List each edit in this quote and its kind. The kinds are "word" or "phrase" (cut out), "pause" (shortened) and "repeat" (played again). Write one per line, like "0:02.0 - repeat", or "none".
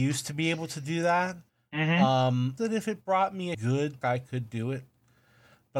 0:01.5 - pause
0:02.6 - phrase
0:03.5 - word
0:04.0 - word